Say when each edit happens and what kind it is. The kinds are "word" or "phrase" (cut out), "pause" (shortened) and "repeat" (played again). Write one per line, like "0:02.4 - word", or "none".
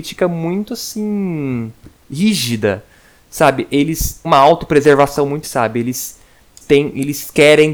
0:04.2 - word
0:05.4 - word
0:06.6 - word